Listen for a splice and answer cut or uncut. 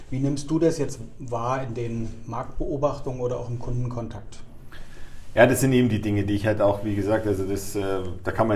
uncut